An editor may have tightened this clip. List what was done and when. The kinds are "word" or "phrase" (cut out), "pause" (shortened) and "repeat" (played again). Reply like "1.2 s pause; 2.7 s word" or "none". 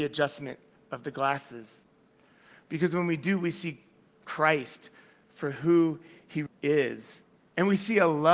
6.5 s word

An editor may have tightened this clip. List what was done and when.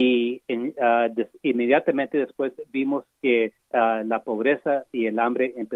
3.6 s pause

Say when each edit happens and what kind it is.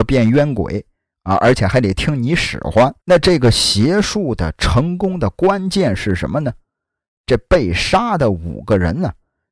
3.0 s pause

